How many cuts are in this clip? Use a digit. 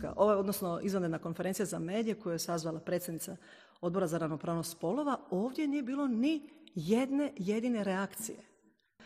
0